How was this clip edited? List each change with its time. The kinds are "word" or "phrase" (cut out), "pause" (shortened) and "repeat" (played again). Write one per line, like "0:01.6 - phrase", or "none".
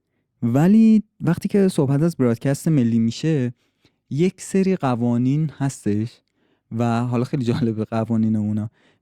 none